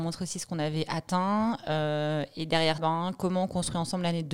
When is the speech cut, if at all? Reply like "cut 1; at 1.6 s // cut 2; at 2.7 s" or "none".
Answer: cut 1; at 2.8 s